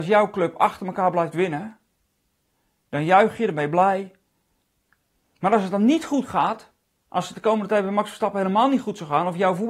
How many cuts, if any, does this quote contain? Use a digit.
1